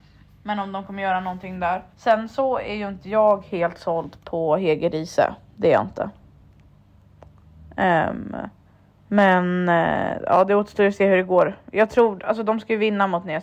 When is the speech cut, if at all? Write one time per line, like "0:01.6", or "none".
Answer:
0:01.9
0:08.7